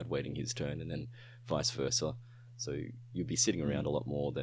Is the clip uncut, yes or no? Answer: yes